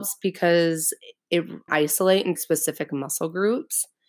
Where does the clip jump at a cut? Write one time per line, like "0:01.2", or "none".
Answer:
0:01.7
0:02.4